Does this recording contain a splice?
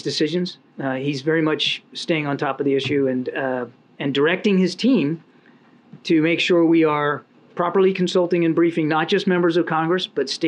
no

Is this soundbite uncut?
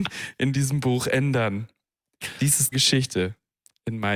no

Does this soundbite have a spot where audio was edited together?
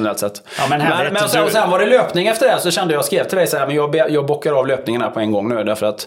no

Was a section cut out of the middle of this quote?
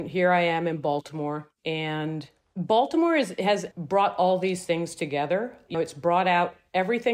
yes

